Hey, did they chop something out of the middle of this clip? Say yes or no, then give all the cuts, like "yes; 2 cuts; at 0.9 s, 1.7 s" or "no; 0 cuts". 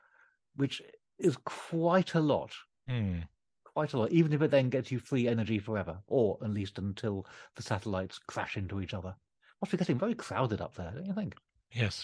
no; 0 cuts